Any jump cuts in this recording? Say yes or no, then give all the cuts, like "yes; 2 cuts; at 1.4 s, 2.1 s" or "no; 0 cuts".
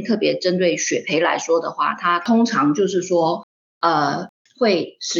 no; 0 cuts